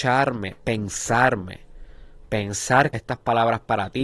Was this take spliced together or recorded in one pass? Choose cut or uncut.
cut